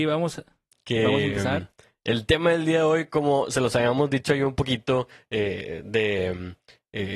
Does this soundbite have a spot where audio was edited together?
no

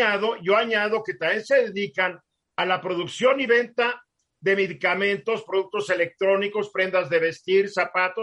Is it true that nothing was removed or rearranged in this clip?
yes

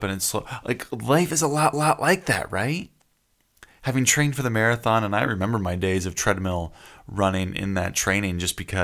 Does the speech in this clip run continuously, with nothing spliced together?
no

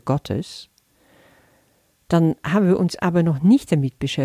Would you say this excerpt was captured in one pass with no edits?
yes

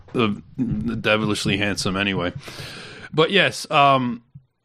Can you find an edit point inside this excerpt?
no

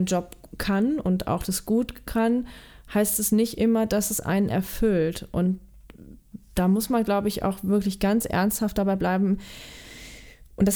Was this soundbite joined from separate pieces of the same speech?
no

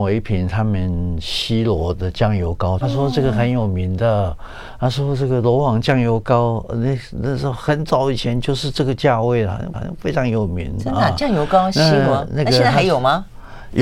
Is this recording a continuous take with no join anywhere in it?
no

